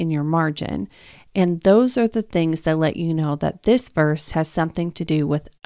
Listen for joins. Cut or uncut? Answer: uncut